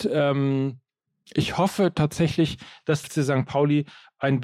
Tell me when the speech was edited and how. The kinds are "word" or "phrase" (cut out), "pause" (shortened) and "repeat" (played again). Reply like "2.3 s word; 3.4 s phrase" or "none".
3.0 s word

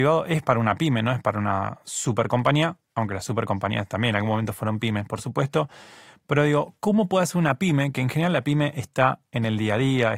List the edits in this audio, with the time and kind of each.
2.8 s pause

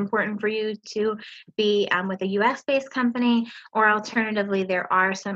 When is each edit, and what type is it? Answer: none

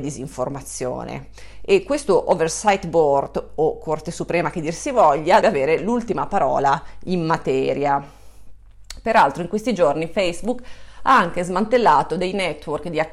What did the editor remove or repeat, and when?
5.4 s word

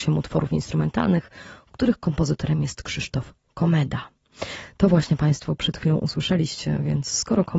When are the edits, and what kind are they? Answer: none

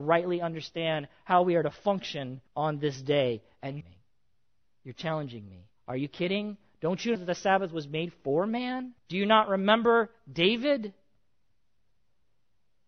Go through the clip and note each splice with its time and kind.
2.5 s pause; 3.8 s phrase; 5.8 s pause; 7.2 s word; 9.0 s pause

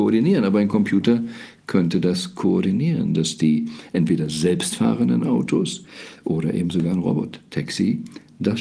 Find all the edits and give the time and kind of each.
none

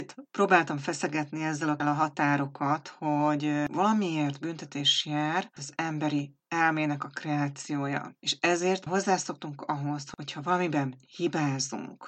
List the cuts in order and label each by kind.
1.8 s word; 3.7 s phrase; 5.6 s word; 8.9 s word

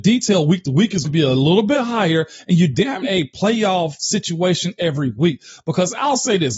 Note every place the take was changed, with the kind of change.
1.0 s word; 3.0 s phrase; 4.8 s word

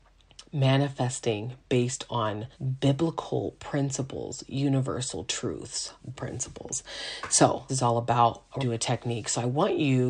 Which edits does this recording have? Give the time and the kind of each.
2.5 s pause; 6.1 s word; 7.7 s phrase; 8.6 s word

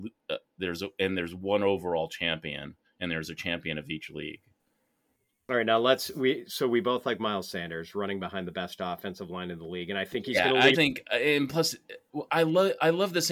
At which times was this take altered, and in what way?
10.7 s word; 12.3 s word

